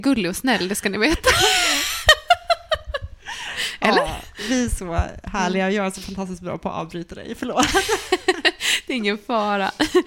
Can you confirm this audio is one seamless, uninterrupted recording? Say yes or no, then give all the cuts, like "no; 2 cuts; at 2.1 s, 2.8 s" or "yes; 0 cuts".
yes; 0 cuts